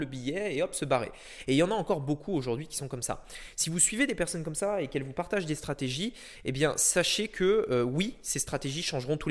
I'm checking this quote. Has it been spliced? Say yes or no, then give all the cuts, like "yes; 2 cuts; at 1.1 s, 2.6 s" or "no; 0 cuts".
no; 0 cuts